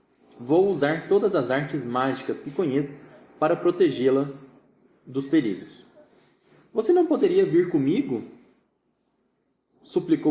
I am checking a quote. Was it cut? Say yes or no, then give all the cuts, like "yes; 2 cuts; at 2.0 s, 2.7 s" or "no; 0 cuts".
no; 0 cuts